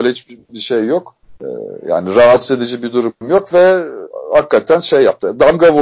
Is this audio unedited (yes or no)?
yes